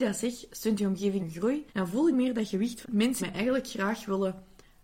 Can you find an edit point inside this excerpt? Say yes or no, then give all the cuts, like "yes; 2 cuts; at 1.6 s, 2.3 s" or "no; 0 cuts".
yes; 5 cuts; at 1.2 s, 1.7 s, 2.1 s, 2.8 s, 3.2 s